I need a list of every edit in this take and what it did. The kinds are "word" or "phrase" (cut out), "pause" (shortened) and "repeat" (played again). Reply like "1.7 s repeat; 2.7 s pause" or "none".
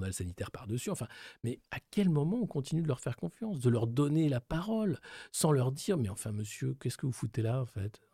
1.6 s pause